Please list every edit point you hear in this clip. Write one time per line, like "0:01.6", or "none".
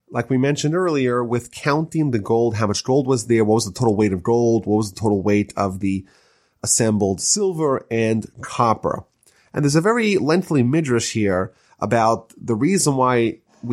none